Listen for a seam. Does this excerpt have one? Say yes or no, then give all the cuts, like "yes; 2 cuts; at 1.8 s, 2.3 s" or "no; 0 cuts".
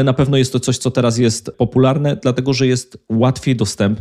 no; 0 cuts